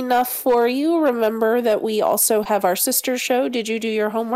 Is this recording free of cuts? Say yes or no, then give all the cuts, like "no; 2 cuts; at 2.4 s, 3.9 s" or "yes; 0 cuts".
yes; 0 cuts